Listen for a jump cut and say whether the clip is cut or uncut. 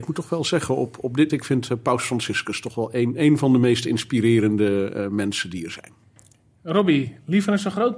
cut